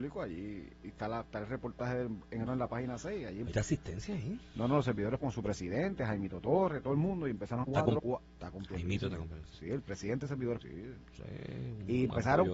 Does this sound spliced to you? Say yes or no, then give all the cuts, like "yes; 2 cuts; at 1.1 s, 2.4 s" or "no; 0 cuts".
yes; 6 cuts; at 2.5 s, 3.5 s, 5.2 s, 7.6 s, 8.0 s, 10.6 s